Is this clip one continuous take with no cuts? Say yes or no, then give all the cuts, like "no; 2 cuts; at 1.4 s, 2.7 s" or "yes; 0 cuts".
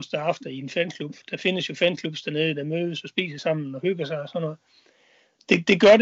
yes; 0 cuts